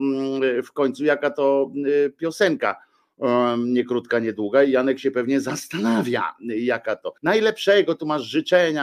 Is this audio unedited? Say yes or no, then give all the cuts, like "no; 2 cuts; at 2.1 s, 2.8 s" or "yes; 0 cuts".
no; 1 cut; at 7.2 s